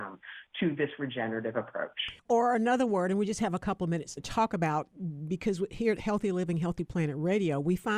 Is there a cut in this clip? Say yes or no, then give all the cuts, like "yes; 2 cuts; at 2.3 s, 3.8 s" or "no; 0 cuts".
yes; 2 cuts; at 2.2 s, 4.2 s